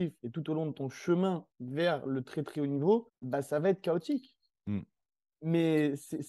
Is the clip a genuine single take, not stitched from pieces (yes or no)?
no